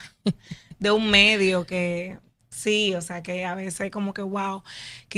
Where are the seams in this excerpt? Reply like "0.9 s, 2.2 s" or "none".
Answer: none